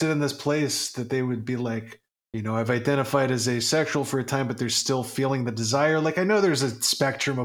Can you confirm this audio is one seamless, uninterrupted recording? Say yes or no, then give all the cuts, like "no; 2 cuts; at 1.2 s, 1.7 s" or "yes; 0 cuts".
no; 1 cut; at 2.1 s